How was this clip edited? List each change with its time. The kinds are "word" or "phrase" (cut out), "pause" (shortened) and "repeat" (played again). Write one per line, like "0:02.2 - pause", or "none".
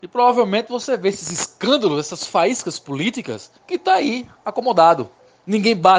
0:03.6 - pause